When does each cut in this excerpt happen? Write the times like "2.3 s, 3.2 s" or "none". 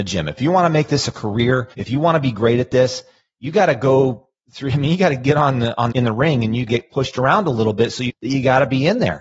1.7 s, 5.9 s, 6.7 s, 8.1 s